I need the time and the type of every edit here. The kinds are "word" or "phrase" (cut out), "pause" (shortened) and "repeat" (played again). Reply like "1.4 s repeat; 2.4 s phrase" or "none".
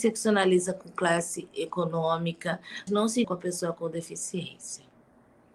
2.9 s word; 3.2 s word